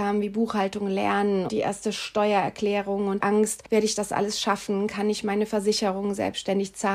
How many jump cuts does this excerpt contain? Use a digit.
3